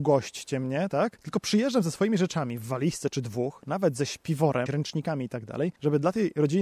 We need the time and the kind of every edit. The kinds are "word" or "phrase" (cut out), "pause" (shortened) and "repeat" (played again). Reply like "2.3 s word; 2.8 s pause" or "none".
4.7 s word